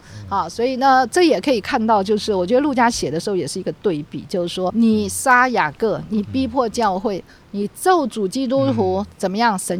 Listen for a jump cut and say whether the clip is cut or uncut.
cut